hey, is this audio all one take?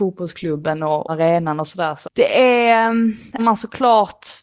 no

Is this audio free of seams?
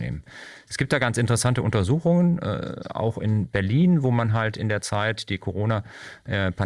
yes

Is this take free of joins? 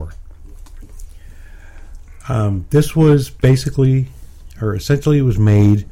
yes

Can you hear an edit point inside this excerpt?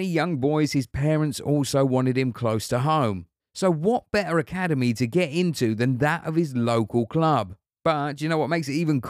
no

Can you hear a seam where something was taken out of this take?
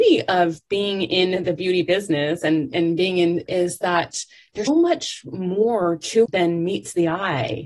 yes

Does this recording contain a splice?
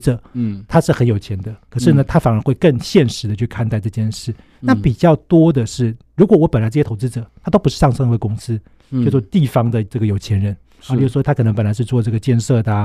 no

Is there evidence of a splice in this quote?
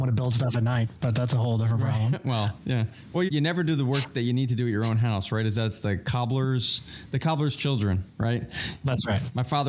yes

